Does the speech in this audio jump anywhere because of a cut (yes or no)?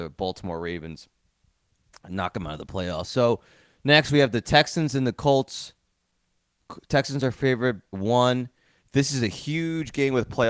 yes